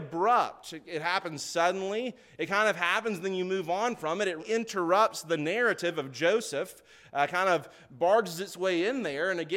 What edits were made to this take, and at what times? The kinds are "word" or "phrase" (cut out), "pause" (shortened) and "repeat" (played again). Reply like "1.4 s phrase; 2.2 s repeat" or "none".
4.4 s word